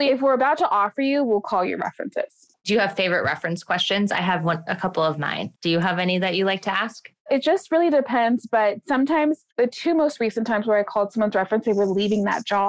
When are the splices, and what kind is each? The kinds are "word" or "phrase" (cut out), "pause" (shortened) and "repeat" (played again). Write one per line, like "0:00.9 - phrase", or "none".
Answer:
0:05.6 - pause
0:09.5 - pause